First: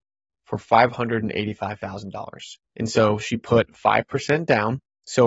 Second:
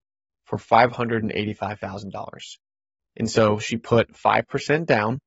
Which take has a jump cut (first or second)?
first